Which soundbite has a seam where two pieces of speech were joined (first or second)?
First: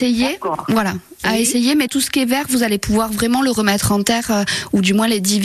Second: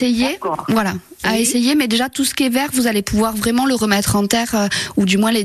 first